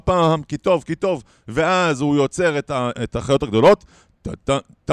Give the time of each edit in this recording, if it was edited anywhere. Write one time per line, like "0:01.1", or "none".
0:02.9